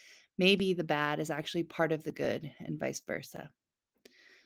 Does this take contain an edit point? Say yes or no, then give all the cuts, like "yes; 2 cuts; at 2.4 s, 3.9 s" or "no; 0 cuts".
no; 0 cuts